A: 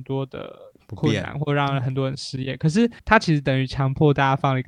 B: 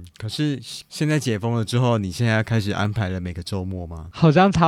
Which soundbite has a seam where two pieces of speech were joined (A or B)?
A